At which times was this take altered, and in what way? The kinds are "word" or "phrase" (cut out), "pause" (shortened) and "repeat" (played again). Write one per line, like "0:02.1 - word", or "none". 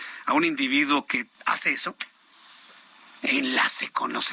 0:01.3 - pause